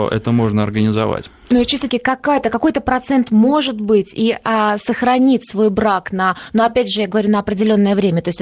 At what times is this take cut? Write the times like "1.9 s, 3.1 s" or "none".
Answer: 1.9 s